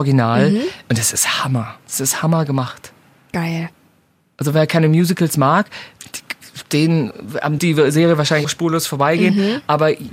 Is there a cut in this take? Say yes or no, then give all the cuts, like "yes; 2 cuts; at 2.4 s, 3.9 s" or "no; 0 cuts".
yes; 2 cuts; at 7.6 s, 8.4 s